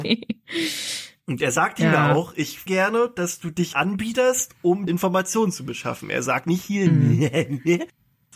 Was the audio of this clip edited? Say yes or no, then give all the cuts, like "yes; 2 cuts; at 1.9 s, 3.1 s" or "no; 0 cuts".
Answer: yes; 4 cuts; at 2.7 s, 3.7 s, 4.9 s, 6.4 s